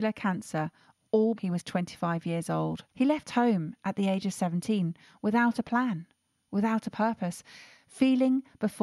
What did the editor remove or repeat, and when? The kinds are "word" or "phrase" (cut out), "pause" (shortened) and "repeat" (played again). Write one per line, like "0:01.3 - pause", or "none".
0:01.4 - word
0:02.9 - pause